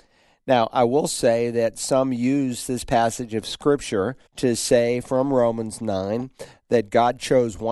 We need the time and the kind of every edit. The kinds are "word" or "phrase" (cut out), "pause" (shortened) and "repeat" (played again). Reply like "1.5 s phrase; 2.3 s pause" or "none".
4.3 s pause